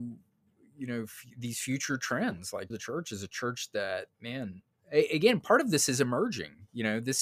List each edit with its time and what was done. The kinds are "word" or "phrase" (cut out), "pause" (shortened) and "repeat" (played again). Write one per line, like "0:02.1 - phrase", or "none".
0:02.7 - phrase
0:04.1 - pause